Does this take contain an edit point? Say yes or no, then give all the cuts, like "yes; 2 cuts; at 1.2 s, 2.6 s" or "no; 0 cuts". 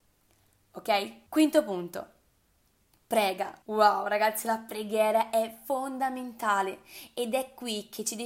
yes; 2 cuts; at 1.3 s, 3.6 s